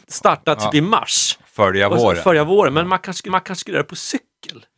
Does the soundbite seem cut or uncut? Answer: cut